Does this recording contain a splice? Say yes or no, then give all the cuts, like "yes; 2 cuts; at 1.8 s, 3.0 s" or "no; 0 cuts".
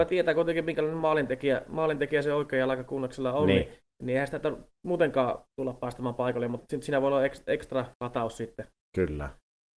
yes; 3 cuts; at 3.9 s, 5.5 s, 7.9 s